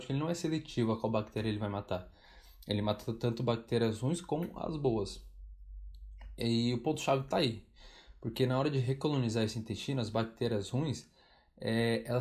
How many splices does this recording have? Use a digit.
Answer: 0